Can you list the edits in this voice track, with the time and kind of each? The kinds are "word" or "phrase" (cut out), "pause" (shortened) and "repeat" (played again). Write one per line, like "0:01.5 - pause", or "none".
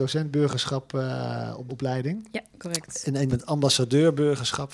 0:01.7 - word
0:03.3 - word